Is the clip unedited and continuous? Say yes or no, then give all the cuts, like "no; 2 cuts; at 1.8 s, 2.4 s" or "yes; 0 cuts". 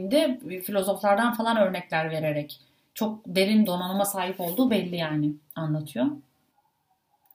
no; 1 cut; at 3.6 s